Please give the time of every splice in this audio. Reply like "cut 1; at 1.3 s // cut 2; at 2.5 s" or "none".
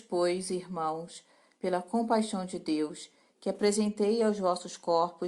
none

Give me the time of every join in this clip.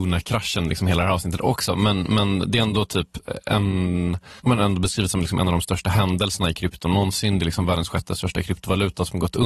cut 1; at 4.4 s

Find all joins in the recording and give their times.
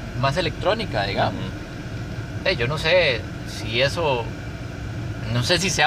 none

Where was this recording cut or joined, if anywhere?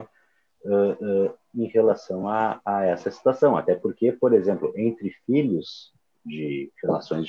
none

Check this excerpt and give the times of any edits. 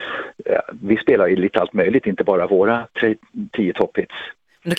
none

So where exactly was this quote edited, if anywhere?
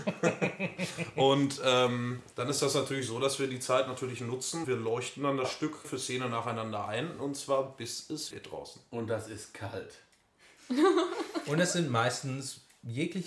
cut 1; at 2.3 s // cut 2; at 4.6 s // cut 3; at 5.8 s // cut 4; at 8.3 s

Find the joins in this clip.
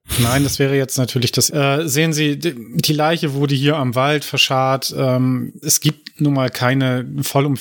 cut 1; at 1.5 s // cut 2; at 5.6 s

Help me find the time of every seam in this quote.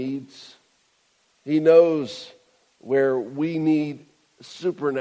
none

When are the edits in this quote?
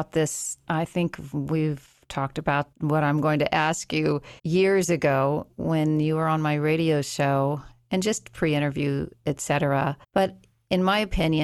cut 1; at 2.7 s // cut 2; at 4.4 s // cut 3; at 10.0 s

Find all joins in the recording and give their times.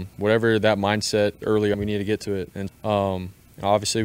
cut 1; at 1.4 s // cut 2; at 1.7 s // cut 3; at 2.7 s

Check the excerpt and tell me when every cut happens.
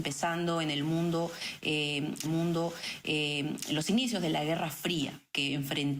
cut 1; at 2.2 s

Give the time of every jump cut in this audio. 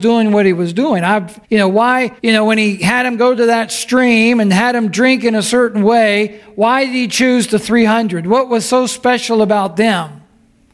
cut 1; at 1.4 s // cut 2; at 2.2 s

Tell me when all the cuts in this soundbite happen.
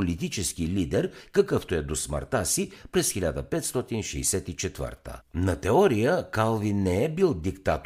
cut 1; at 5.2 s

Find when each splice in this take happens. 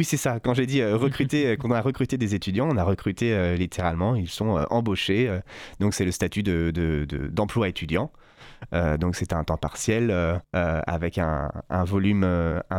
cut 1; at 10.4 s

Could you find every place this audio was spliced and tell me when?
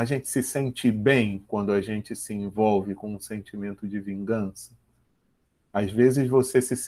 none

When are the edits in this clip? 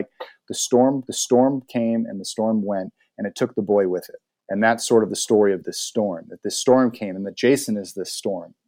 cut 1; at 1.1 s // cut 2; at 4.3 s

